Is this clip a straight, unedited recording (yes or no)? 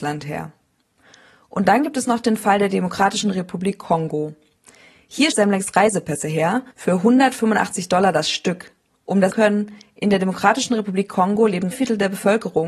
no